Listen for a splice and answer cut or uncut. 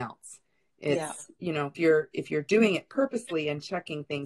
cut